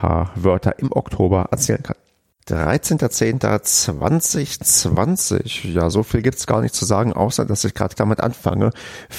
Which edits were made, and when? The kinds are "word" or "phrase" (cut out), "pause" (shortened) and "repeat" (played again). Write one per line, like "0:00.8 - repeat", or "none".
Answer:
0:08.0 - word